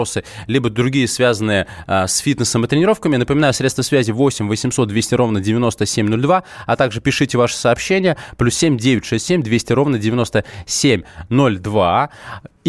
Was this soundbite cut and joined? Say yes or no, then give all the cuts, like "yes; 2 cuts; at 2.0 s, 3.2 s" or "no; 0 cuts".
no; 0 cuts